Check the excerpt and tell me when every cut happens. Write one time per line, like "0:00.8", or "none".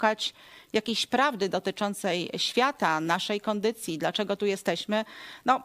none